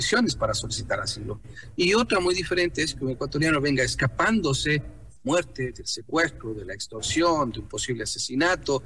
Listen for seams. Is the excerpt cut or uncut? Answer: cut